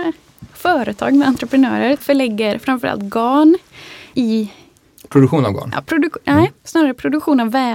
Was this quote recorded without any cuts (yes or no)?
no